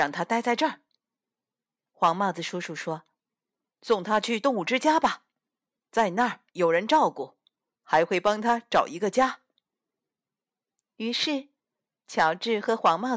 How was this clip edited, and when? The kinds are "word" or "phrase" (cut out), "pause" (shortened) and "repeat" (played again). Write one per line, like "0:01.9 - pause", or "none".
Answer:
0:06.5 - pause